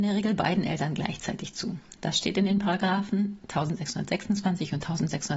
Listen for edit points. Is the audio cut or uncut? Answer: uncut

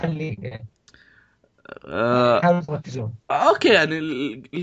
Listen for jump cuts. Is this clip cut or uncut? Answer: cut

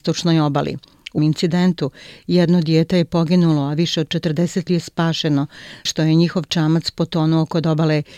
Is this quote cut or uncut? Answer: cut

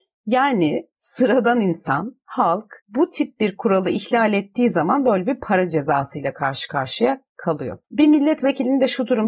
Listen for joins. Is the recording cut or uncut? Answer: cut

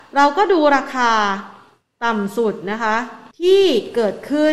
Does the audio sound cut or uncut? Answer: cut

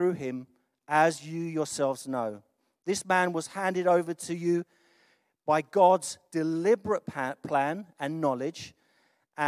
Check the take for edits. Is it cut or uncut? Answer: uncut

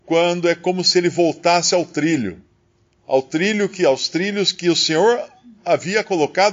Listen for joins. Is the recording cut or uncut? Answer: uncut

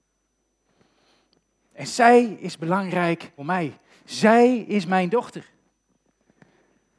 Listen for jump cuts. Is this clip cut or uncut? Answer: cut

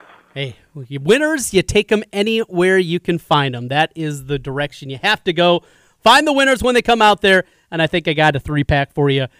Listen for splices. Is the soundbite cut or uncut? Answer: uncut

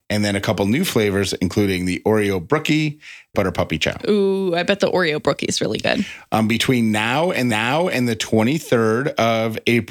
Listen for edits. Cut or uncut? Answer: cut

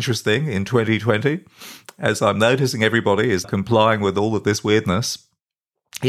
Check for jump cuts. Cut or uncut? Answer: cut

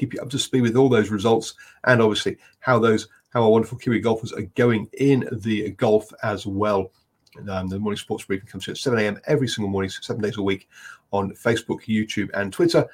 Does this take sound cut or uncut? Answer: uncut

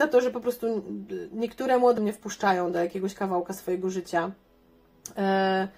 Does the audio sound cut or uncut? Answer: cut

